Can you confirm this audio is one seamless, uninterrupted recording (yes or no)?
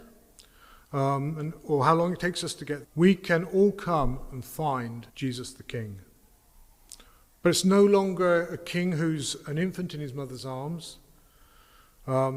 no